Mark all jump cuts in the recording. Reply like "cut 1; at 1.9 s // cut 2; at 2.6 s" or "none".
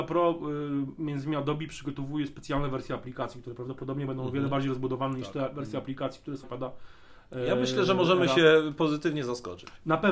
cut 1; at 6.4 s